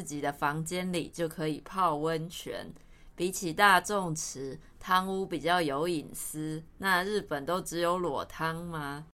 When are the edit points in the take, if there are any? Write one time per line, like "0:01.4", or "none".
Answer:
0:06.7